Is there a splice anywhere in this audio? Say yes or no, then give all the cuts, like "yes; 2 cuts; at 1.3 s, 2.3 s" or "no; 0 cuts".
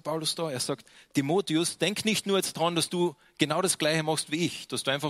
no; 0 cuts